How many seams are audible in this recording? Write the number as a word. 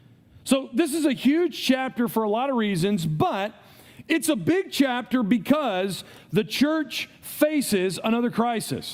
zero